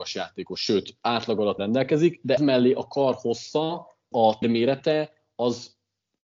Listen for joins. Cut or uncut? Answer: cut